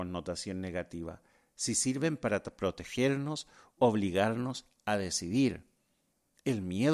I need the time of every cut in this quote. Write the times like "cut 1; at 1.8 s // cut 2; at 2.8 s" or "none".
cut 1; at 3.8 s